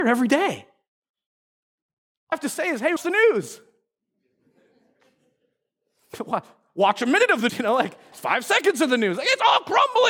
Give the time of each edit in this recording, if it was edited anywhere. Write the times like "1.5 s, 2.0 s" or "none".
2.3 s, 3.0 s, 7.5 s, 8.1 s